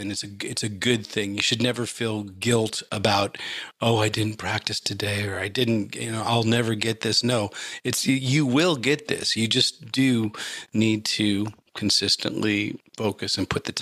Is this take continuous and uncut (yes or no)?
yes